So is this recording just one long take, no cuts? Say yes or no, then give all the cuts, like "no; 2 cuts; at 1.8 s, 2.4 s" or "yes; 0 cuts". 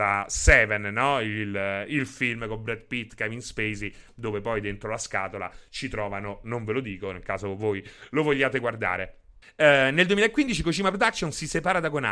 no; 1 cut; at 9.4 s